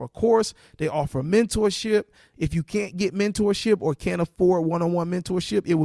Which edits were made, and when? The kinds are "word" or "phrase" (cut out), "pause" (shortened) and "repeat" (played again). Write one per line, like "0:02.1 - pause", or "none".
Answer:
none